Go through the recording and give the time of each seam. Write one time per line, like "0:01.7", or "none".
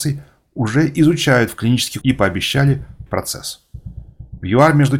0:02.0
0:03.1